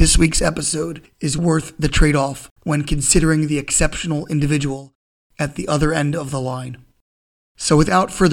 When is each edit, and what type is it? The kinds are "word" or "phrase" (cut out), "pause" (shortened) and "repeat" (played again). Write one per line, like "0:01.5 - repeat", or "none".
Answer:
0:01.4 - word
0:02.6 - pause